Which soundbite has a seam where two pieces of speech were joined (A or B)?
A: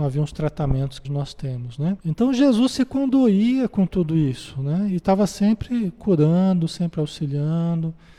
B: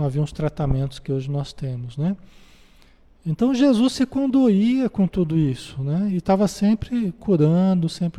A